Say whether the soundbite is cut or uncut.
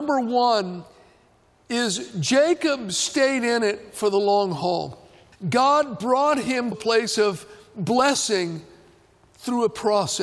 cut